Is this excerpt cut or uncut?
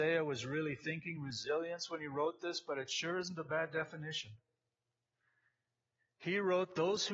uncut